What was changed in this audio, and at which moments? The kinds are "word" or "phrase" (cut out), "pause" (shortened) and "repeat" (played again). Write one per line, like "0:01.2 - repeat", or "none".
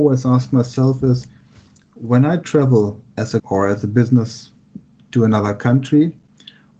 0:03.4 - word
0:05.0 - word